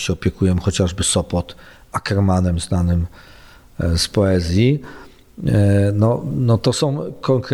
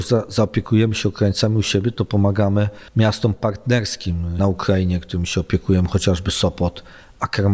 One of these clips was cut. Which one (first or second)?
second